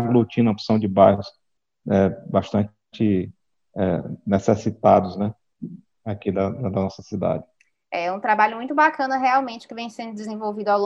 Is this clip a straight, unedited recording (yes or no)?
yes